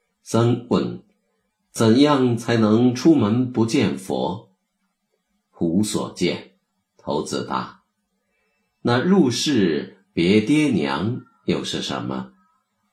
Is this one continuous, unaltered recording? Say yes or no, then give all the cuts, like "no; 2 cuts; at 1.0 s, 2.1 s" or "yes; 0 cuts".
no; 1 cut; at 6.6 s